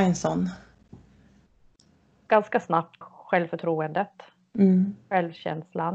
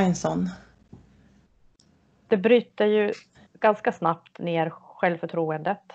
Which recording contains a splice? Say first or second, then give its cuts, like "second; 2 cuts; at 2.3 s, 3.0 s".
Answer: first; 2 cuts; at 2.3 s, 3.0 s